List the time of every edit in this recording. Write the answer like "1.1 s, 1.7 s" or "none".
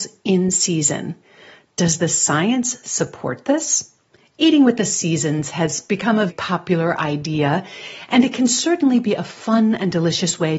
4.1 s, 6.3 s